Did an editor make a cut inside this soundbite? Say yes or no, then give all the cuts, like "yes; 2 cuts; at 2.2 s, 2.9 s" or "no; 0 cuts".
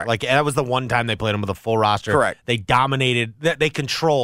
no; 0 cuts